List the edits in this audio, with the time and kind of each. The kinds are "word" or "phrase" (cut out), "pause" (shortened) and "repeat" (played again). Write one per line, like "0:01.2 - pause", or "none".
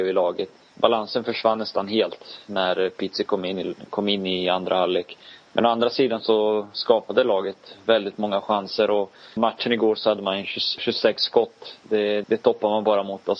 0:09.4 - word
0:10.8 - word
0:12.2 - word

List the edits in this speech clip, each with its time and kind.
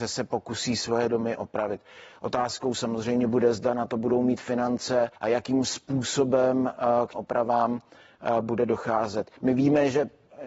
0:05.2 - pause
0:07.1 - word
0:09.4 - pause

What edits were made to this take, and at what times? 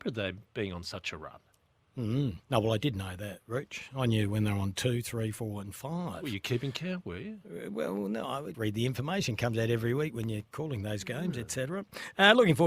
0:02.4 - pause
0:08.5 - word

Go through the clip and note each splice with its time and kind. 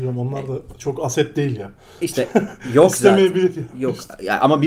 none

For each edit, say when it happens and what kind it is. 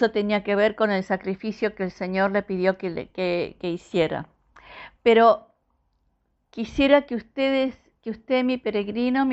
none

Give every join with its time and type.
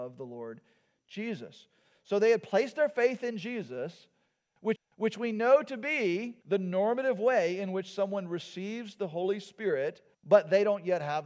0:04.8 - repeat
0:06.4 - pause
0:10.1 - pause

